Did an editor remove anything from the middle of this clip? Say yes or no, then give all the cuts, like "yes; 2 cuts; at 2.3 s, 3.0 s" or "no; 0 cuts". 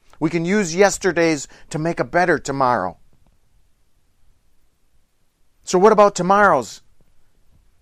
no; 0 cuts